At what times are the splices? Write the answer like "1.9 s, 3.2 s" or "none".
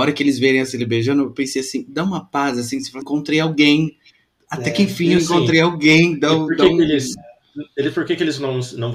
3.0 s